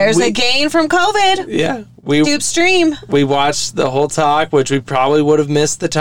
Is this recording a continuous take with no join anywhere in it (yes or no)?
no